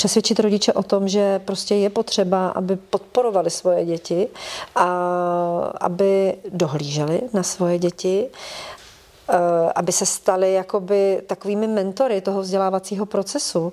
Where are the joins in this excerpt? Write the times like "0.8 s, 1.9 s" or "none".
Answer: none